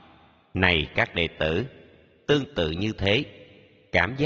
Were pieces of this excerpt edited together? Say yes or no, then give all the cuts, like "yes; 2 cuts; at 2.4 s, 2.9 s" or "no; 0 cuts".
no; 0 cuts